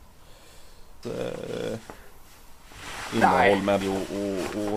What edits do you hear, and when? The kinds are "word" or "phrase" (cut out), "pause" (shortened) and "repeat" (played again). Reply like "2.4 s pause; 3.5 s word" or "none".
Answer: 1.0 s word; 3.8 s word